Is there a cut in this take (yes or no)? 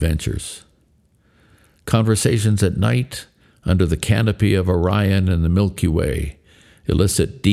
no